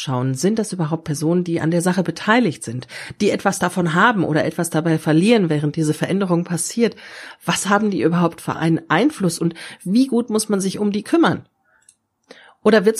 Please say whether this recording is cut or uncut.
uncut